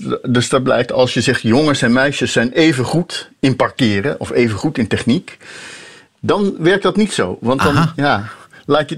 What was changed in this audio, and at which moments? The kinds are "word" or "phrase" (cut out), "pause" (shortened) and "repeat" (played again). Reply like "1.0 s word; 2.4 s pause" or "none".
none